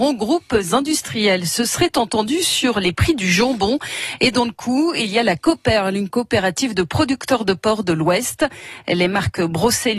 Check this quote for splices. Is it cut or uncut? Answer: uncut